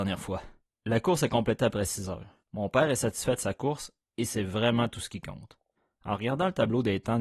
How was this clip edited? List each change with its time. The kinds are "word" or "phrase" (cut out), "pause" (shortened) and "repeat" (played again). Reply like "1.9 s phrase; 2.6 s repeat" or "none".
2.4 s pause; 5.8 s pause